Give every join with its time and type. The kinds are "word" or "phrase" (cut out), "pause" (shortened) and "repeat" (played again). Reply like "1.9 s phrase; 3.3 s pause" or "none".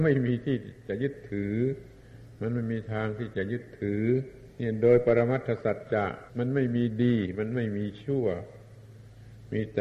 4.5 s pause; 6.3 s pause